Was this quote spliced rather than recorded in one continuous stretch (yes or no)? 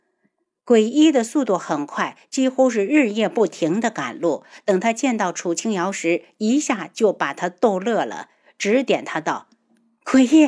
no